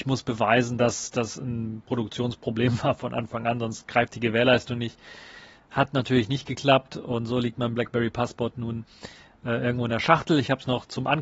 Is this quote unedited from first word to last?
yes; 0 cuts

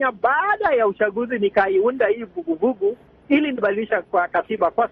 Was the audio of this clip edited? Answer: no; 0 cuts

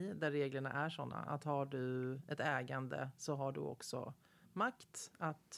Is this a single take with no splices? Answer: yes; 0 cuts

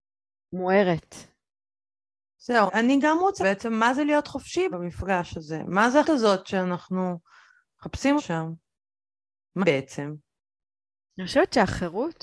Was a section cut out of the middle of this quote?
yes; 6 cuts; at 2.7 s, 3.4 s, 4.7 s, 6.0 s, 8.2 s, 9.6 s

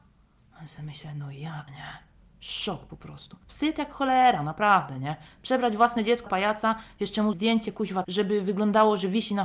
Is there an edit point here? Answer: yes; 5 cuts; at 1.7 s, 3.4 s, 6.3 s, 7.3 s, 8.0 s

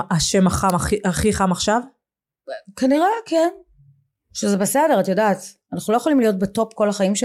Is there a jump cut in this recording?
no; 0 cuts

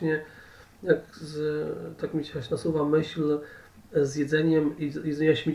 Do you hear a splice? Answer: no; 0 cuts

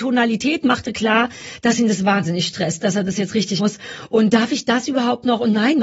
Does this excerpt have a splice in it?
yes; 1 cut; at 3.6 s

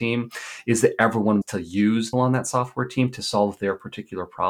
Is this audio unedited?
no; 2 cuts; at 1.4 s, 2.1 s

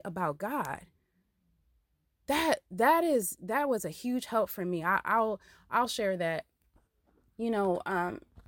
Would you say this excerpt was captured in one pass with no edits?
yes; 0 cuts

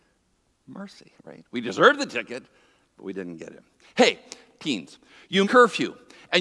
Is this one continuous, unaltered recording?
no; 1 cut; at 5.4 s

